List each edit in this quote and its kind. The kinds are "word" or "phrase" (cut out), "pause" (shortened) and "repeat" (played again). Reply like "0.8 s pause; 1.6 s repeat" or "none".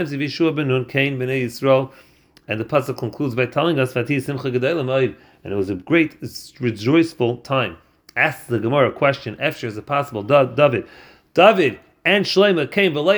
6.2 s word

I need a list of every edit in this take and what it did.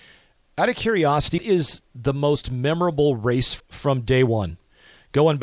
1.4 s word; 3.6 s word

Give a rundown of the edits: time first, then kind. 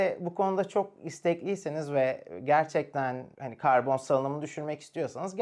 none

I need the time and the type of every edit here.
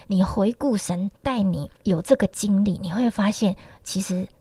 1.1 s pause; 1.8 s pause

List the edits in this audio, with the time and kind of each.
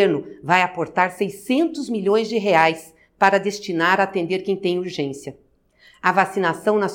none

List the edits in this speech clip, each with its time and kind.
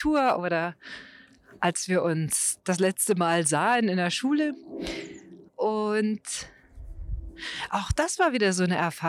5.5 s pause

